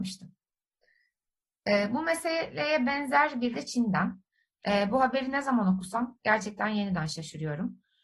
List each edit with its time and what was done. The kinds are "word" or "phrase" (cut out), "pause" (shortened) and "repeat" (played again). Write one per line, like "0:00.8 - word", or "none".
0:03.5 - word

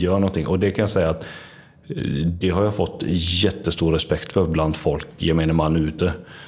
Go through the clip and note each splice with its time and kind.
none

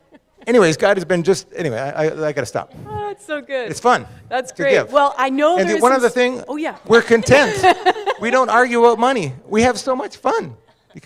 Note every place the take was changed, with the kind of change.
none

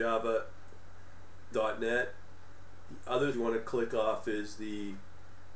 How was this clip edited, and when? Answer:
0:01.5 - word
0:03.3 - phrase

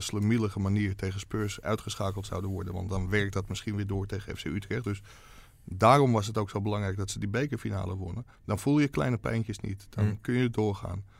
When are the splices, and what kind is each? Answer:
0:08.4 - pause

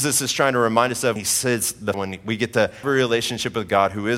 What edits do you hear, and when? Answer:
0:01.2 - word
0:01.9 - word
0:02.8 - word

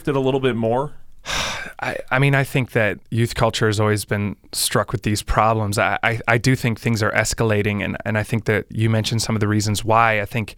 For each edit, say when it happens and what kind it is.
0:03.0 - pause
0:04.4 - pause

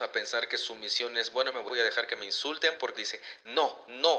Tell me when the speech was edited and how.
0:01.7 - phrase
0:02.9 - phrase

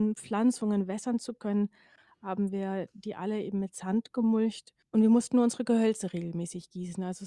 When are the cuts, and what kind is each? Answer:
none

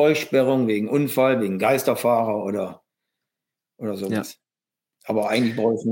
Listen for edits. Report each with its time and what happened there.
none

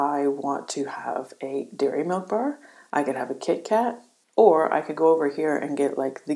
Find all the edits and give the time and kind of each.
none

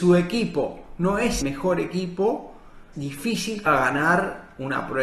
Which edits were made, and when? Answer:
0:01.4 - word
0:02.9 - word
0:03.7 - word

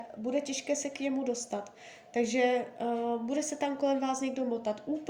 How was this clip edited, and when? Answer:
none

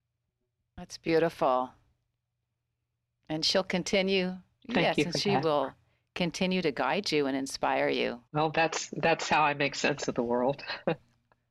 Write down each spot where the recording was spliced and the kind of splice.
0:08.3 - pause

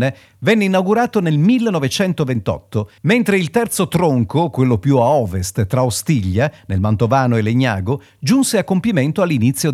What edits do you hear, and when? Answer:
0:03.0 - pause

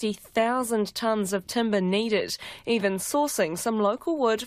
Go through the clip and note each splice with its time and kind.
none

